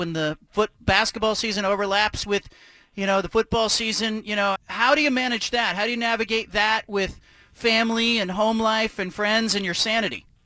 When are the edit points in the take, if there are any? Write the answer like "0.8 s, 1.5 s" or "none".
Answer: 4.6 s